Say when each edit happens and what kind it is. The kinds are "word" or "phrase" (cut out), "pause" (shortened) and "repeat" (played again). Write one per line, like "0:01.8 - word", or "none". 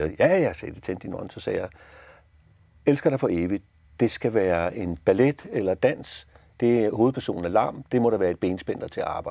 none

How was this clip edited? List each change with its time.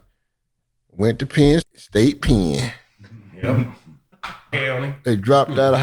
0:01.6 - word
0:04.5 - word

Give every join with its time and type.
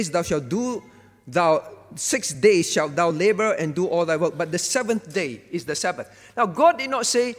none

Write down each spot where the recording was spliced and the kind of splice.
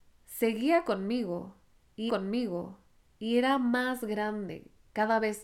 0:02.1 - repeat

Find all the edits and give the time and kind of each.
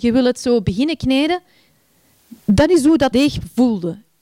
0:03.1 - word

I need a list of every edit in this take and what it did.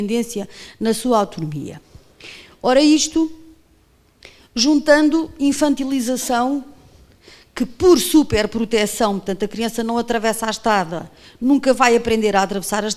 none

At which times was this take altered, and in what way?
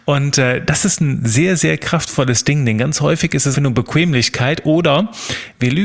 0:03.5 - word

